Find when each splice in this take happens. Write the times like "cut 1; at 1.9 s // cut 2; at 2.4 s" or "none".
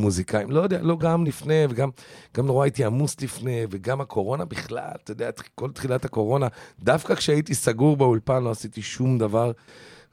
none